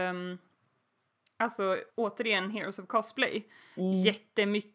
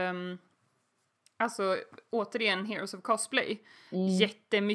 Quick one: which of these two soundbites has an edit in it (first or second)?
first